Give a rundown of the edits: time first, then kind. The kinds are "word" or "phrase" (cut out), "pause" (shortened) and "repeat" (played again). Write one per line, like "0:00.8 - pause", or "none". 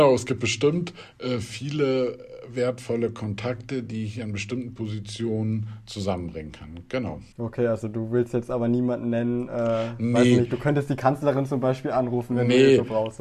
0:07.3 - pause